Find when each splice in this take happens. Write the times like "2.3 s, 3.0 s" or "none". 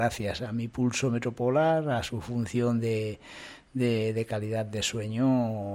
none